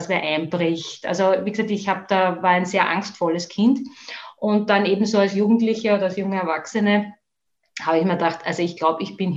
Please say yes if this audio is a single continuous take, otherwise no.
yes